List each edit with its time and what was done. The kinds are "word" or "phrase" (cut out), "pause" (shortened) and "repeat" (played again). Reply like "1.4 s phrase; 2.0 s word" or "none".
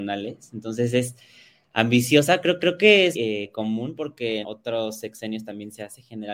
2.6 s repeat; 3.1 s word; 4.4 s word